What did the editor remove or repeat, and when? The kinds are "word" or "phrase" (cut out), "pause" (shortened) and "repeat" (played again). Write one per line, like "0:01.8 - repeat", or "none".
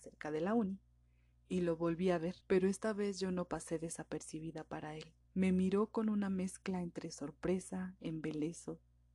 0:02.4 - pause
0:05.2 - pause